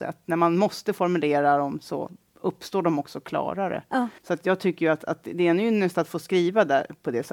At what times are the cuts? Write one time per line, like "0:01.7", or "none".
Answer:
0:04.2

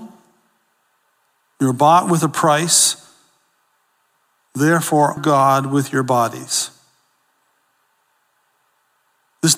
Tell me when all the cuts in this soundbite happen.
0:05.2

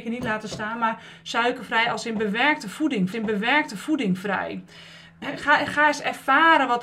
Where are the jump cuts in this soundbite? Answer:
0:03.1

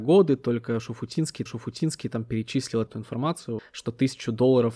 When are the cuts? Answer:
0:01.5
0:02.9
0:03.6

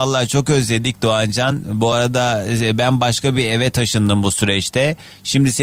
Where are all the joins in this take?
none

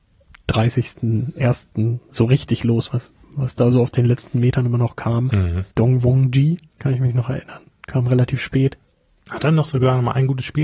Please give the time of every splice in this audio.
0:03.2
0:05.7
0:06.7

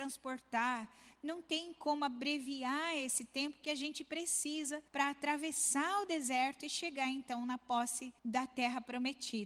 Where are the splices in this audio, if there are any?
0:04.9
0:08.2

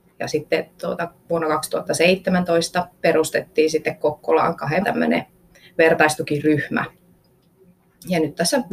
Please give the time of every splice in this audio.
0:03.0
0:04.8

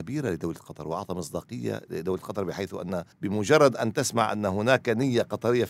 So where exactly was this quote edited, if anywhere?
0:03.1

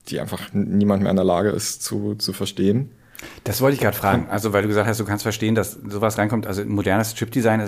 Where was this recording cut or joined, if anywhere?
none

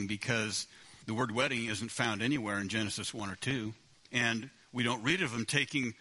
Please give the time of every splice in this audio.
0:01.0
0:03.9

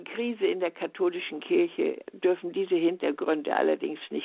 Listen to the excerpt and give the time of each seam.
none

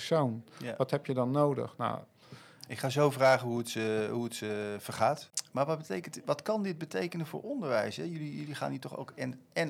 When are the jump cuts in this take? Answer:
none

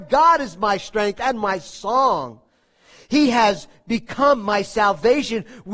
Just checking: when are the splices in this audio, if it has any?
none

